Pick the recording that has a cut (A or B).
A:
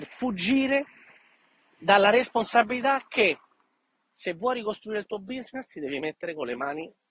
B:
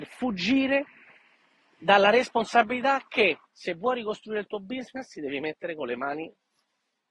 B